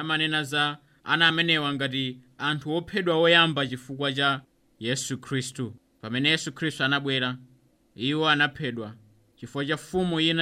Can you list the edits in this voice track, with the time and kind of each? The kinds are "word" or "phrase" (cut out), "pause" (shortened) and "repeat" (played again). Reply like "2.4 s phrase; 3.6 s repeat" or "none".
none